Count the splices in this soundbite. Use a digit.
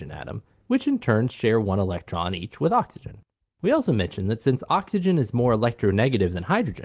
1